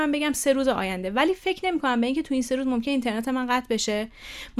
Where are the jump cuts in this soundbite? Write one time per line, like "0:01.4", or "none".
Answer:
none